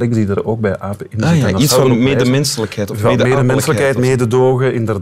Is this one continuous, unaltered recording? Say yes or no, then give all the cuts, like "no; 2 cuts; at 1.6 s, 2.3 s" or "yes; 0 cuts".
yes; 0 cuts